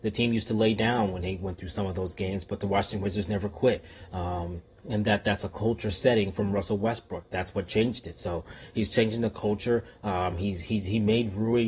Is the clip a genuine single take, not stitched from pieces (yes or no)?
yes